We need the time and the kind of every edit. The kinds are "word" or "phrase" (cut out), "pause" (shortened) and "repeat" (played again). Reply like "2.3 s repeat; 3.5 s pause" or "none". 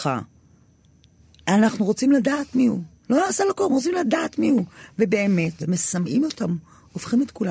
5.6 s phrase